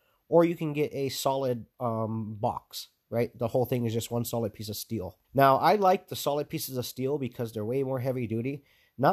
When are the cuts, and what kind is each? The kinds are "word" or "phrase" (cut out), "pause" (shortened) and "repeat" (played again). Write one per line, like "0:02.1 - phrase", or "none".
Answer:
0:01.7 - pause
0:05.2 - pause